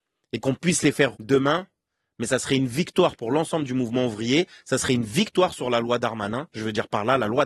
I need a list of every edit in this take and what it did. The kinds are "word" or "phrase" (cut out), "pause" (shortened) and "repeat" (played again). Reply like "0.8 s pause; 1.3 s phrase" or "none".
1.1 s word